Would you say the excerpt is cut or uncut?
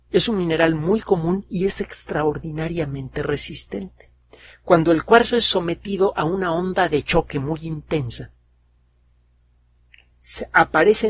uncut